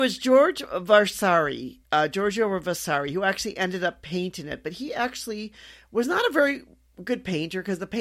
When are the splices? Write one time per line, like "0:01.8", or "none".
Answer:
0:01.8